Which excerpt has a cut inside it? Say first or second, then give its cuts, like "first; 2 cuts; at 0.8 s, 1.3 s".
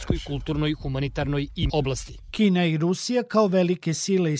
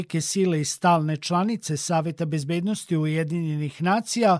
first; 1 cut; at 1.7 s